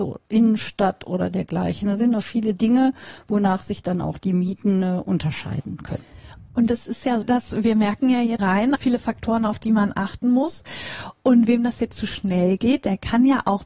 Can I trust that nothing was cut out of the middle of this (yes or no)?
no